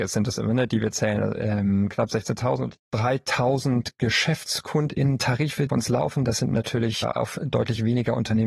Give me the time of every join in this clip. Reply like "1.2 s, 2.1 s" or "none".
5.7 s, 7.0 s